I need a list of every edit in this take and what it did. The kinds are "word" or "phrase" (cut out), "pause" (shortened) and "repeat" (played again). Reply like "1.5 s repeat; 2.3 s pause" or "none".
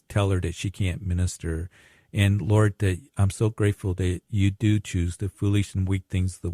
none